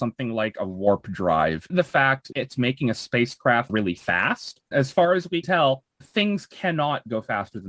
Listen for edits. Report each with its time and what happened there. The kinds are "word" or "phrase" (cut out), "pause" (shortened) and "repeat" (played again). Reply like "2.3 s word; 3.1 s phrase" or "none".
1.7 s word; 2.3 s word; 3.7 s word; 4.7 s word; 5.4 s word; 6.0 s word